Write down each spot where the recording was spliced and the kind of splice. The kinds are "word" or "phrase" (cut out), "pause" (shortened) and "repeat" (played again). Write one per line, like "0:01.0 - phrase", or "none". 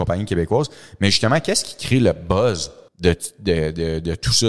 0:02.9 - pause